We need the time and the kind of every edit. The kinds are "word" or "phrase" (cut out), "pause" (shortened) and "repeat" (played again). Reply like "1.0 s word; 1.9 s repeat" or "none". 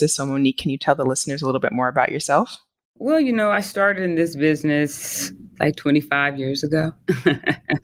none